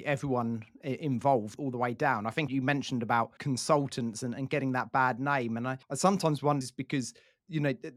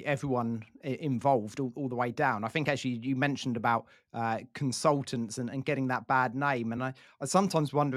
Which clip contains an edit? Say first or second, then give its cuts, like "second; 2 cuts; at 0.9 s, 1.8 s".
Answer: first; 5 cuts; at 1.6 s, 2.5 s, 3.4 s, 5.8 s, 6.6 s